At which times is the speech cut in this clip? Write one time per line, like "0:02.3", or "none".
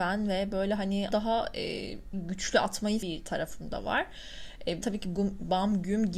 0:01.1
0:02.1
0:03.0
0:04.8
0:05.1